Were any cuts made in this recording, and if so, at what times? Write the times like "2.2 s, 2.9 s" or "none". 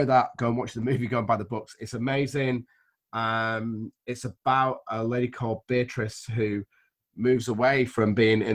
none